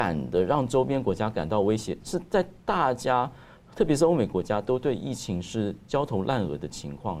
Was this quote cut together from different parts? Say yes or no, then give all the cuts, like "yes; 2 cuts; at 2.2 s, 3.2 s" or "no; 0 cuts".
no; 0 cuts